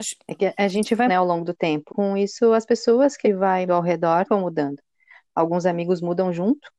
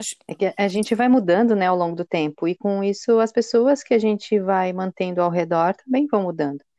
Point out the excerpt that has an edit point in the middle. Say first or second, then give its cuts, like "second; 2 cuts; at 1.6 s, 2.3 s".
first; 5 cuts; at 1.1 s, 1.9 s, 3.2 s, 3.7 s, 4.3 s